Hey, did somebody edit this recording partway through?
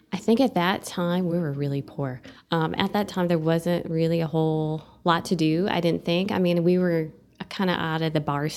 no; 0 cuts

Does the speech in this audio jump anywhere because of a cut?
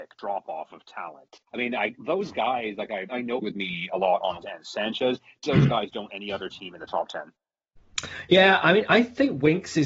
yes; 7 cuts; at 1.5 s, 2.0 s, 3.1 s, 3.4 s, 4.4 s, 5.5 s, 6.1 s

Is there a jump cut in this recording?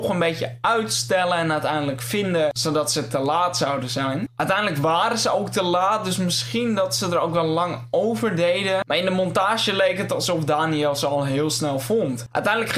no; 0 cuts

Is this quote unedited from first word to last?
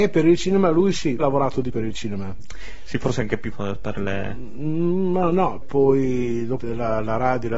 no; 5 cuts; at 1.2 s, 1.7 s, 3.5 s, 5.6 s, 6.6 s

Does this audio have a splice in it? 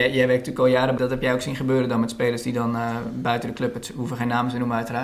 yes; 1 cut; at 1.0 s

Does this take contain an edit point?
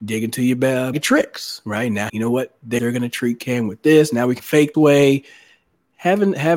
yes; 5 cuts; at 0.9 s, 2.1 s, 2.8 s, 4.4 s, 4.7 s

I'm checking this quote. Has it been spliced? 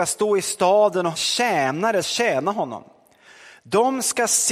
yes; 2 cuts; at 1.1 s, 2.0 s

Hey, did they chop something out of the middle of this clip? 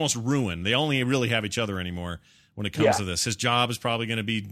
no; 0 cuts

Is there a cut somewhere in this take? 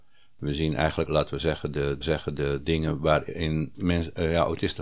yes; 3 cuts; at 1.1 s, 2.0 s, 3.7 s

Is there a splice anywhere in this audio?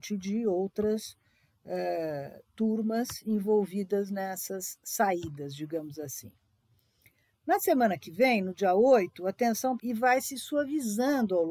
yes; 1 cut; at 9.8 s

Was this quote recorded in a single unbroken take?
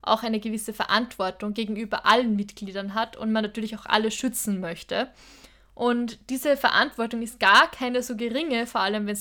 yes; 0 cuts

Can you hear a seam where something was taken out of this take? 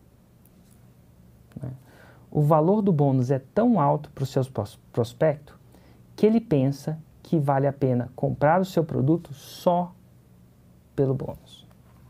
no; 0 cuts

